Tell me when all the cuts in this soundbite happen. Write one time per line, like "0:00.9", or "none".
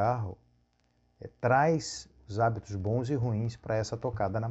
none